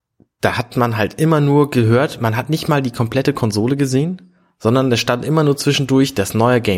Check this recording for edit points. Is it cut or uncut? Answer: uncut